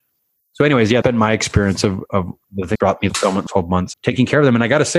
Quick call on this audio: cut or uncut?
cut